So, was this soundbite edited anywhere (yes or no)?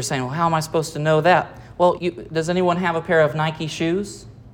yes